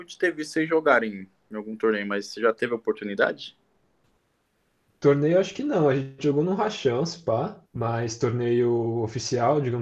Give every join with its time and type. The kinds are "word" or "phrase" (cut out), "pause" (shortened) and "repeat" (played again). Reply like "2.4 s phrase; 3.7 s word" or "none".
7.6 s pause